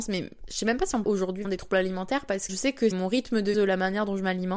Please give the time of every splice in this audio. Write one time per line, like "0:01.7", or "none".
0:01.0
0:01.4
0:02.5
0:02.9
0:03.5